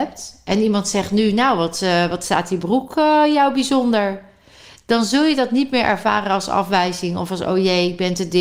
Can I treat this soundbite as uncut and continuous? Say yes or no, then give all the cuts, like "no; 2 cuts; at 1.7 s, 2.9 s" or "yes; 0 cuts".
yes; 0 cuts